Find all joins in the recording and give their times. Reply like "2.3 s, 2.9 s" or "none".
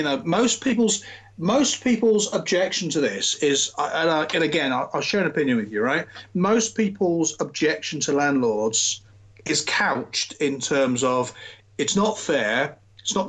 none